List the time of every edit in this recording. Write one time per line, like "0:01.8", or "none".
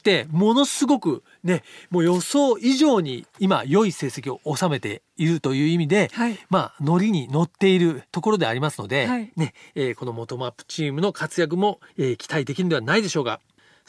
0:11.9